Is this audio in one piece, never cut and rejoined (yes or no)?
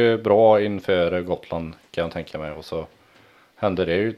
yes